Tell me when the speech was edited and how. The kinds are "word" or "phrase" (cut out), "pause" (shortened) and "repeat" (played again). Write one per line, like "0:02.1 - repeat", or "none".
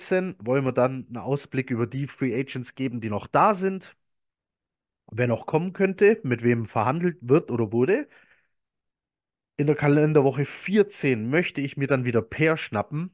none